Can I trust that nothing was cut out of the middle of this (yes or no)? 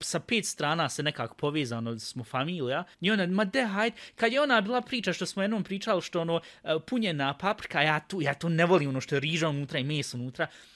no